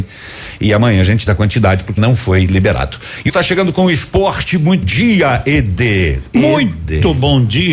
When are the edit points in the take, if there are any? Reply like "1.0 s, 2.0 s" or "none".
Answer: 1.3 s, 2.0 s, 3.3 s, 4.8 s

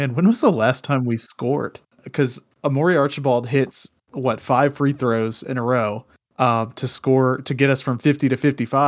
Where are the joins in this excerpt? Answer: none

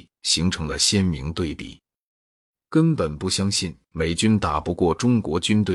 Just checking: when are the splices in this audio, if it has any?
none

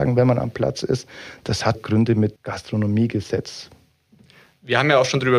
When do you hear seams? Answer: 1.7 s, 2.4 s

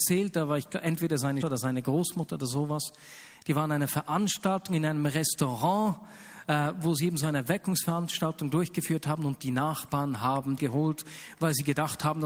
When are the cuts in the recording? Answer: 1.4 s, 10.6 s

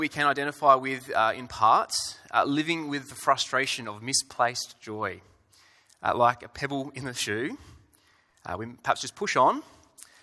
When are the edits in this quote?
none

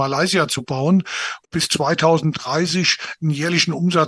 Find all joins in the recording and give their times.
1.4 s

